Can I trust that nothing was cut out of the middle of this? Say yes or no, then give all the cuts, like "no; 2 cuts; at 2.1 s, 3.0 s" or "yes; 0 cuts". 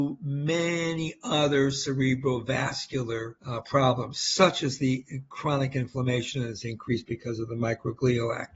no; 1 cut; at 3.4 s